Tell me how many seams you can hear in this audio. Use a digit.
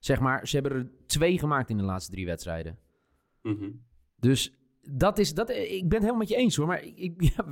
0